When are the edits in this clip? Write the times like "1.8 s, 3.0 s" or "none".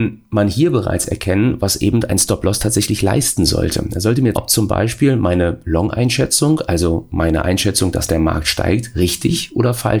4.3 s